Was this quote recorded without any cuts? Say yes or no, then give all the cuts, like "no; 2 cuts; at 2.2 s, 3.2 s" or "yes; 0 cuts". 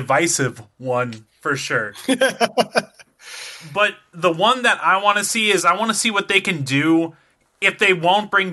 yes; 0 cuts